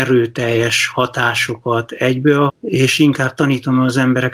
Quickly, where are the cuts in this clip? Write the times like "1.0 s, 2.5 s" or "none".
2.5 s